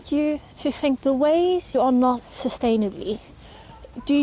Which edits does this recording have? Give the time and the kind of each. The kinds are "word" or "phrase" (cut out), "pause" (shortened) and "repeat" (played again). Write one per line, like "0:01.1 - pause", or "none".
0:01.0 - word
0:01.7 - word
0:02.2 - word